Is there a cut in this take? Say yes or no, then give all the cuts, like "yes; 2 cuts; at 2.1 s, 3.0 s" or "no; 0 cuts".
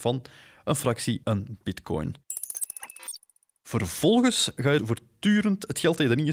yes; 2 cuts; at 1.2 s, 4.8 s